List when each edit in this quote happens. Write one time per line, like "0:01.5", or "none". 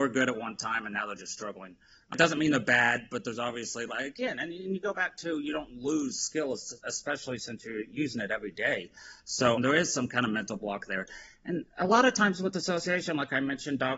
none